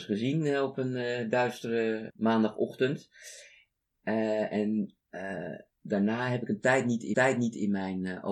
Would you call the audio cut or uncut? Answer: cut